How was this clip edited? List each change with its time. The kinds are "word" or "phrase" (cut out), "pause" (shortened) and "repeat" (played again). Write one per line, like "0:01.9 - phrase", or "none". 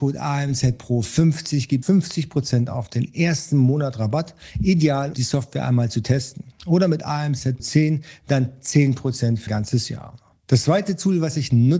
0:01.8 - word
0:05.1 - word
0:07.6 - word
0:09.5 - word